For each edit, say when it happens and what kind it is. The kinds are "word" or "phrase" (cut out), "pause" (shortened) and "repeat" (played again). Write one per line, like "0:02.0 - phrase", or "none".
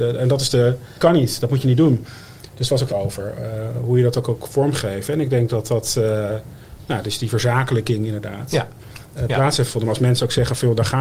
0:01.0 - word
0:02.9 - phrase